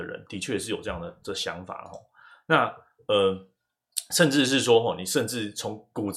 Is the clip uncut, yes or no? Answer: yes